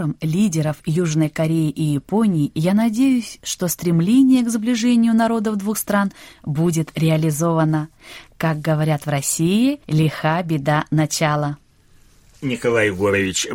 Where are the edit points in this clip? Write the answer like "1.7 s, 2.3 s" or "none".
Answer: 9.8 s